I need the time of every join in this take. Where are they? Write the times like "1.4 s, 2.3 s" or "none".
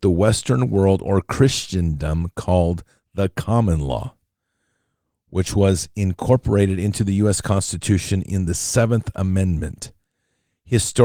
none